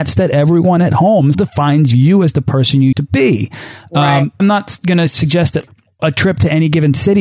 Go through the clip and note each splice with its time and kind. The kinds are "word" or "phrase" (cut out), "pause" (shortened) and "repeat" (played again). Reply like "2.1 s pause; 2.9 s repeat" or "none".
1.3 s word; 2.9 s word; 4.4 s word